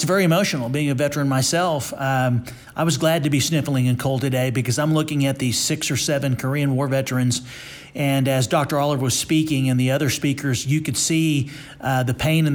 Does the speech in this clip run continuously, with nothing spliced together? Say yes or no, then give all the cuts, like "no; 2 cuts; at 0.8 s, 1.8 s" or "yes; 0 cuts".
yes; 0 cuts